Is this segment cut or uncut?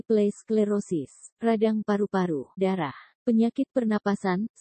cut